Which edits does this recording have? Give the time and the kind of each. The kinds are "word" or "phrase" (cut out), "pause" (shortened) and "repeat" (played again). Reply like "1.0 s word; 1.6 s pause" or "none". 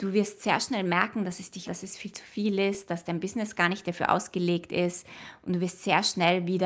1.6 s word